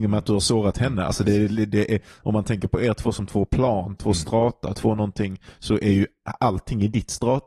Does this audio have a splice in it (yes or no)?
no